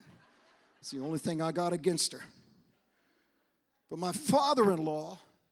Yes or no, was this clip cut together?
no